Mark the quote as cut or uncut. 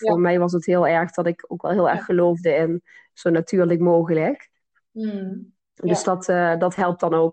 uncut